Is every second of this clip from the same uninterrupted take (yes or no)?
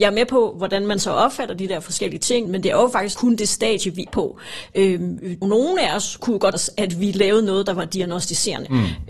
no